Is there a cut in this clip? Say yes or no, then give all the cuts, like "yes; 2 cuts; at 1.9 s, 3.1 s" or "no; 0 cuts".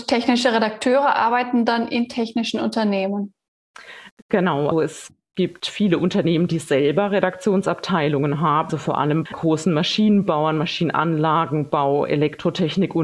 yes; 3 cuts; at 4.7 s, 8.7 s, 9.3 s